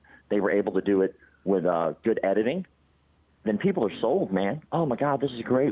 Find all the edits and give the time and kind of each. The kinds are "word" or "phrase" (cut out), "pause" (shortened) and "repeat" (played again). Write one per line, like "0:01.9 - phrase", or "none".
none